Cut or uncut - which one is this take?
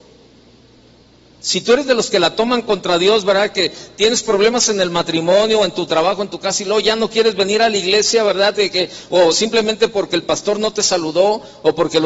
uncut